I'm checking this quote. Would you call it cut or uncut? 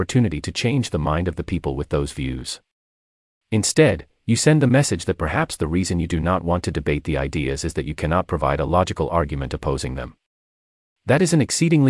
uncut